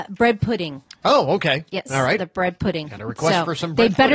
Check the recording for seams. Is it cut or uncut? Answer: uncut